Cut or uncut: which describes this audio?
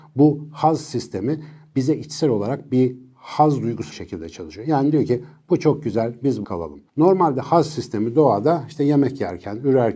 cut